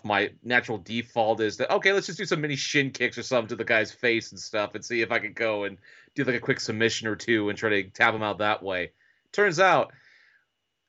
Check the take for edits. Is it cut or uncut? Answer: uncut